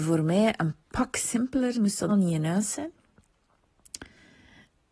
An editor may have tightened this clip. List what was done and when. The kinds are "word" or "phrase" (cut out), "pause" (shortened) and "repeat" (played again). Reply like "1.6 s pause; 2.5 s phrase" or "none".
1.7 s word; 2.1 s word